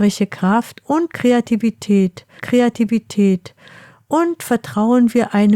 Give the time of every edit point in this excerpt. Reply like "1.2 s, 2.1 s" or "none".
2.4 s